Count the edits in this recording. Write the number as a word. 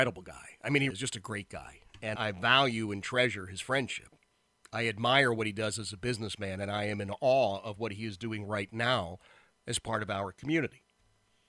two